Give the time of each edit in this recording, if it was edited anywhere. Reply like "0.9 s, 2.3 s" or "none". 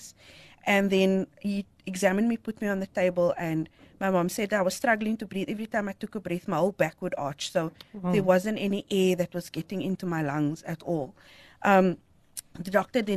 none